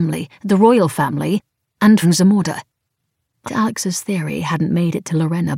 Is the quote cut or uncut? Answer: cut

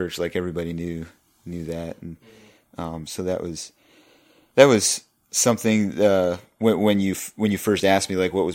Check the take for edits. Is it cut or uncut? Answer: uncut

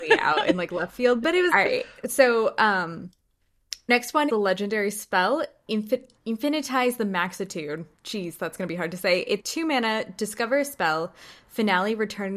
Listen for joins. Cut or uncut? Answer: cut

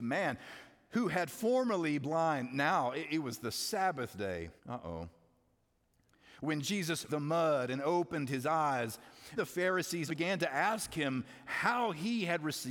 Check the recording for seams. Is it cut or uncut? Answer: cut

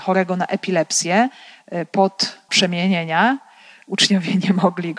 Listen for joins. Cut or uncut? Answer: cut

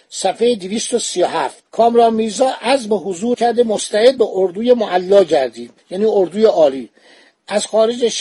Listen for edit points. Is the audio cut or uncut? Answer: cut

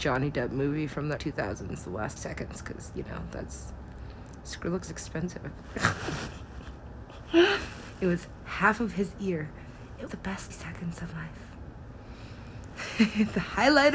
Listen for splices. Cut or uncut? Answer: cut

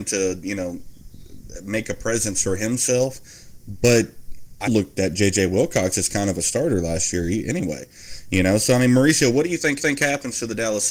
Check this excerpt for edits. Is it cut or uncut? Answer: cut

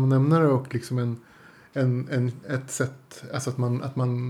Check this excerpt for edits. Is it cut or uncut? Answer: uncut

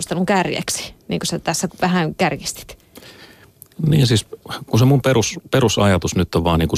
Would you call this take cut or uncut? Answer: cut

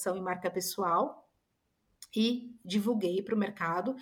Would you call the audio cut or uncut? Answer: uncut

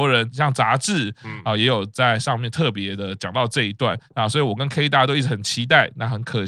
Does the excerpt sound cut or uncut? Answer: uncut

